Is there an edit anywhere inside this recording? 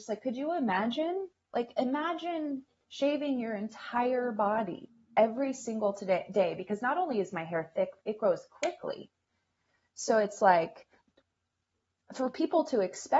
no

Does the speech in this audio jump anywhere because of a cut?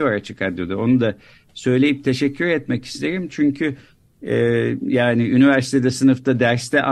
no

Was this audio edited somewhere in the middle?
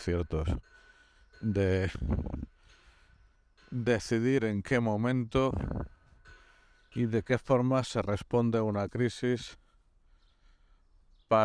no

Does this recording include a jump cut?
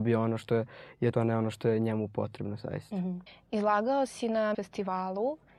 yes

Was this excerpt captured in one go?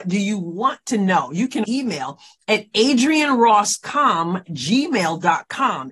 no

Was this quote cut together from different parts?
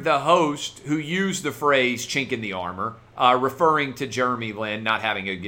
no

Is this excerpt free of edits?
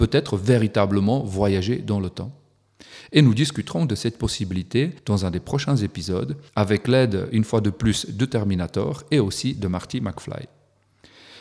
no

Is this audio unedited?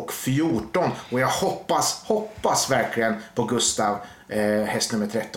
yes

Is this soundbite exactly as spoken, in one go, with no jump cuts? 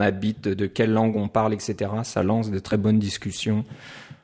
yes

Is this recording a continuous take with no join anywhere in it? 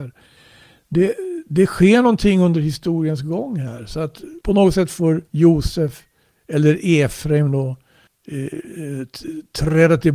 no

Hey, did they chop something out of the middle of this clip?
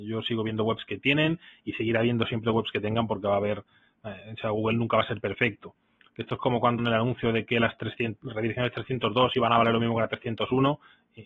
yes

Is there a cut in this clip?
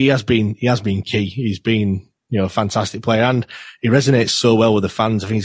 no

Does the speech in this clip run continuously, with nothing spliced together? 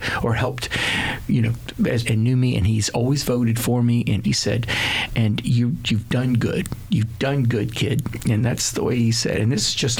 no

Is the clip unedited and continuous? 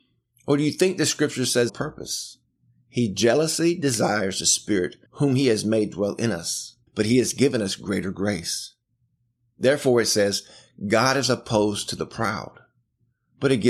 no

